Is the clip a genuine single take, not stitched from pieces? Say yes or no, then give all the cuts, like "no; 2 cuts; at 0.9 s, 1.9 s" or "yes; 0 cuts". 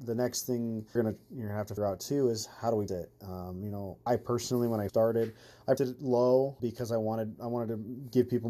no; 7 cuts; at 1.0 s, 1.8 s, 2.9 s, 4.1 s, 4.9 s, 5.8 s, 6.6 s